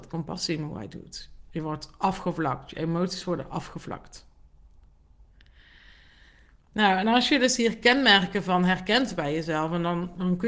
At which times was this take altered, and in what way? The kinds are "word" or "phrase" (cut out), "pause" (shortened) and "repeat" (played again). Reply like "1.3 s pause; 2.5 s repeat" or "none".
none